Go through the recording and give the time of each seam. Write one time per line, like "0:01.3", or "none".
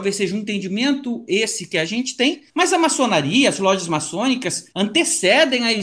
0:02.5
0:04.7